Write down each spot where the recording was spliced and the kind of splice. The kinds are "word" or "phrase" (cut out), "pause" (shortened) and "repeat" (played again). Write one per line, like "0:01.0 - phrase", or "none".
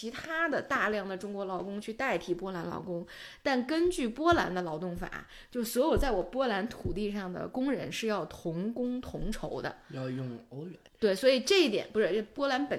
0:10.9 - pause